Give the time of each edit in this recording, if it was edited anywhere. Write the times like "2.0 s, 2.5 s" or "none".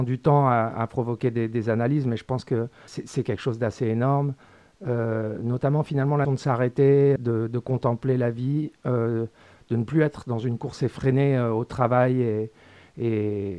2.9 s, 6.2 s, 7.2 s